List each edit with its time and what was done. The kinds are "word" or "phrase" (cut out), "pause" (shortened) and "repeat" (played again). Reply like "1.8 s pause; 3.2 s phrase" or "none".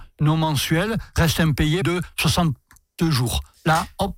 1.8 s phrase